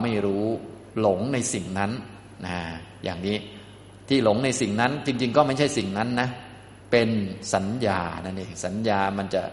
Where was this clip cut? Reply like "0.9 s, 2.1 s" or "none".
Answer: 6.8 s